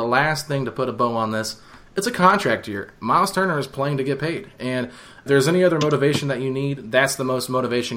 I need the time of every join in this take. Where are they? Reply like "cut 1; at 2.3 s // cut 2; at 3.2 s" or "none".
cut 1; at 5.3 s